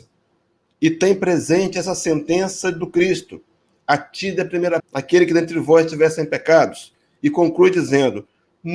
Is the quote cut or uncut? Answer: cut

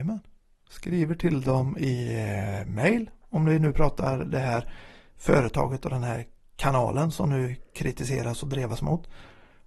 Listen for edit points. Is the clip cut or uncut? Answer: uncut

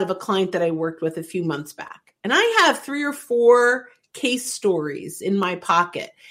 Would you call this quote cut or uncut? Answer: uncut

